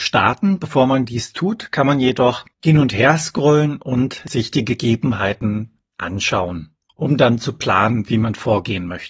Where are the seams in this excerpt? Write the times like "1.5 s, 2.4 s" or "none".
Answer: 2.5 s